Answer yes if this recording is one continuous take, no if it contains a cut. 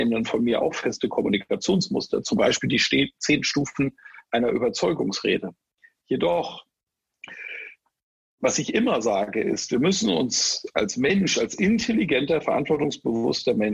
yes